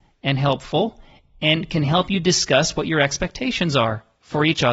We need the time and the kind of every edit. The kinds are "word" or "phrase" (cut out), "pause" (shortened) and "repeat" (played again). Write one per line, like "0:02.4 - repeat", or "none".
none

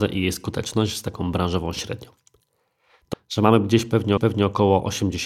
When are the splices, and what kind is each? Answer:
0:03.1 - word
0:04.2 - repeat

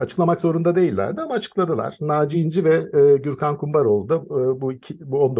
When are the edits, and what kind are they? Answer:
none

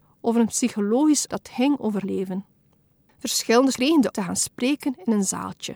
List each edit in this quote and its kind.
0:01.3 - word
0:02.0 - word
0:03.7 - word
0:04.1 - word

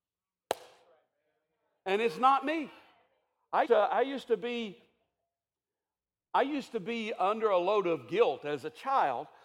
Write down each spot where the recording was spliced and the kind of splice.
0:03.6 - word

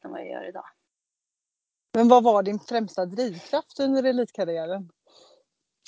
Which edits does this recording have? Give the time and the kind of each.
none

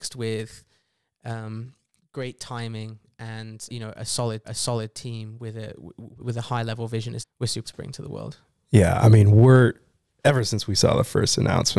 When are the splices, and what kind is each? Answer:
0:02.0 - phrase
0:03.7 - word
0:04.4 - repeat
0:06.2 - word
0:07.2 - phrase
0:07.6 - word

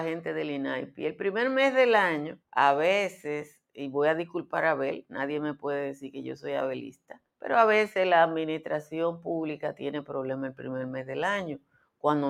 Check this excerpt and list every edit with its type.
0:02.4 - pause
0:07.3 - pause

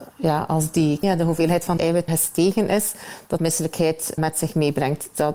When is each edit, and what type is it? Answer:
0:01.0 - word
0:01.8 - word
0:02.1 - word
0:03.4 - word
0:04.2 - word

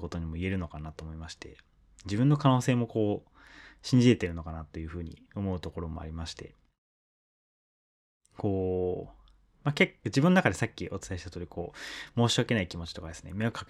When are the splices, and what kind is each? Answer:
none

